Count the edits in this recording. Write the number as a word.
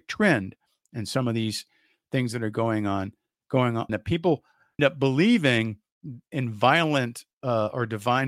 two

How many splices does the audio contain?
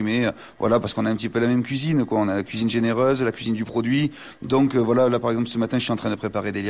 zero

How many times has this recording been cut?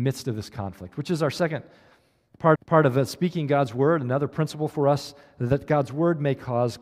one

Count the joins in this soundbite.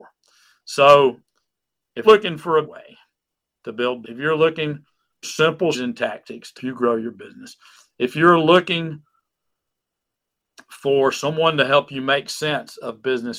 six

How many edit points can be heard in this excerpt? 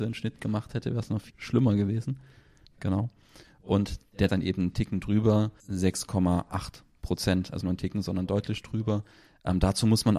four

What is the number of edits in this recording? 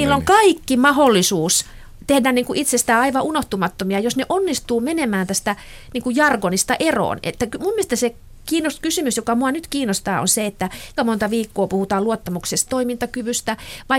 two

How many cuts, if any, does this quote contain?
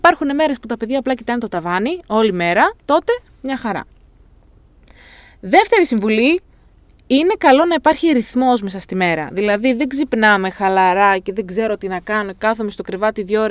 one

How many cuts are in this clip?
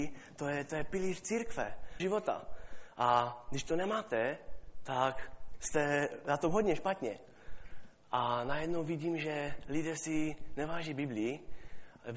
one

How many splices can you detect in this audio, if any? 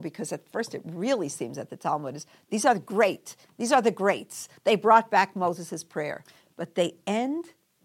zero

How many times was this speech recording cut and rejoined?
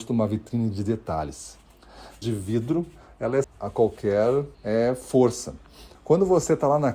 four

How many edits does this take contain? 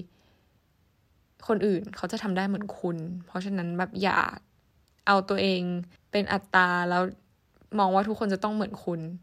one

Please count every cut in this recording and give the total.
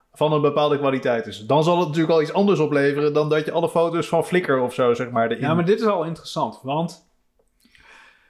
zero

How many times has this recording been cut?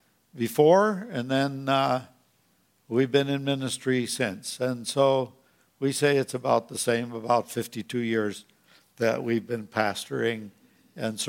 zero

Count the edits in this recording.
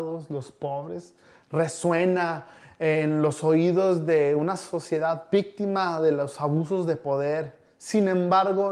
zero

